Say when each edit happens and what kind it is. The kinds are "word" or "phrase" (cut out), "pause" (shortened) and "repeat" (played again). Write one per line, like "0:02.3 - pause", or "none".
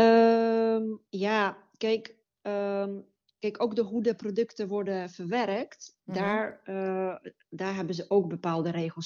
0:01.1 - pause
0:03.2 - pause